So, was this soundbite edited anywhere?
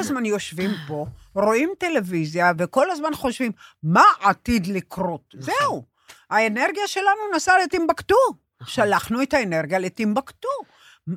no; 0 cuts

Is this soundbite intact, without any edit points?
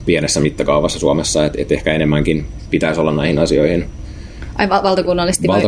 yes; 0 cuts

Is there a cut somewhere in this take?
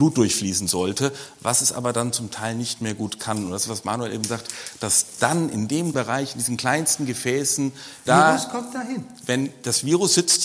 yes; 2 cuts; at 5.9 s, 8.1 s

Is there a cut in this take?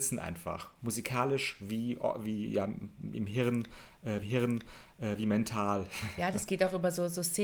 yes; 1 cut; at 4.2 s

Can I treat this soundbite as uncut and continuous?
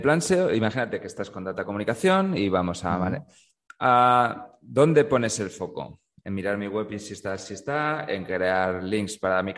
yes; 0 cuts

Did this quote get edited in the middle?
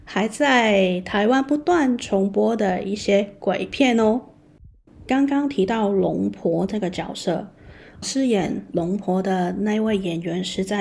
yes; 1 cut; at 8.0 s

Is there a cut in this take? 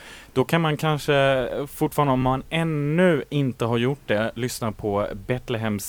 no; 0 cuts

